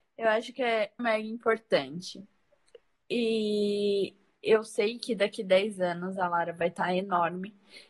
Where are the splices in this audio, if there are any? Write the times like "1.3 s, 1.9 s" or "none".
1.0 s